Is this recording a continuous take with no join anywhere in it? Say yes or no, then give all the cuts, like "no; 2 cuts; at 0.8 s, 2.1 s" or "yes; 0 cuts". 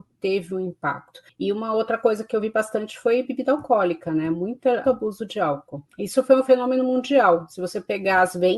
no; 1 cut; at 4.8 s